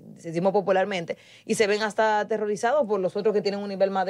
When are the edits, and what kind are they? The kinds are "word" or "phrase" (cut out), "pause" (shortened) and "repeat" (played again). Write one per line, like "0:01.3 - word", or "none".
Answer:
none